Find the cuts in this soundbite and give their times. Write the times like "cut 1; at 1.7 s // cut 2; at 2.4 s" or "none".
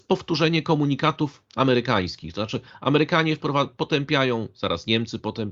none

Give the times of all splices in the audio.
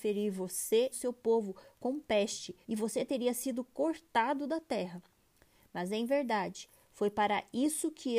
cut 1; at 0.9 s // cut 2; at 2.6 s

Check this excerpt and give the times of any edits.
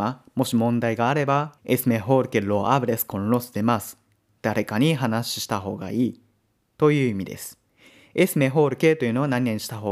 cut 1; at 1.6 s

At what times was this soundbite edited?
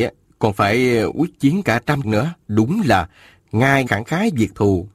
cut 1; at 2.0 s // cut 2; at 2.4 s // cut 3; at 3.9 s

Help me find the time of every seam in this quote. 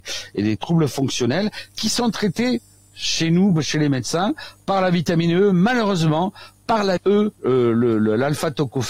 cut 1; at 7.0 s // cut 2; at 7.3 s

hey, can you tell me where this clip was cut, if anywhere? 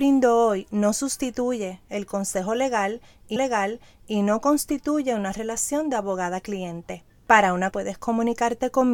cut 1; at 3.4 s // cut 2; at 7.1 s // cut 3; at 7.7 s

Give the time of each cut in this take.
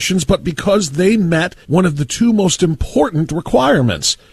cut 1; at 1.6 s

